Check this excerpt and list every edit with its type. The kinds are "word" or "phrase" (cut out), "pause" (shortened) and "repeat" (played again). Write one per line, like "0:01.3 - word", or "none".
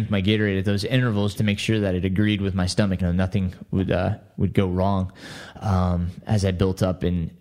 0:01.3 - word
0:03.0 - phrase